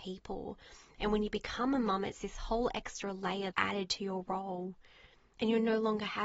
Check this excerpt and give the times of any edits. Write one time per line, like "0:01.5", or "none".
0:03.5